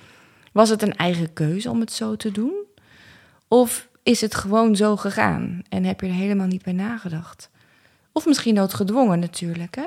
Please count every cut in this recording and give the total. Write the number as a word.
zero